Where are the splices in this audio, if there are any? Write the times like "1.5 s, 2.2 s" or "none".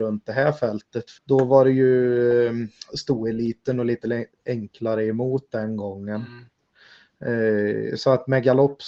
1.2 s